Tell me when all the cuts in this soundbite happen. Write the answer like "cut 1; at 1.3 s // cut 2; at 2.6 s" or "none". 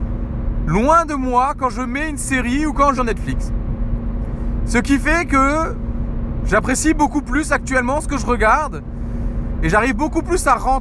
cut 1; at 3.0 s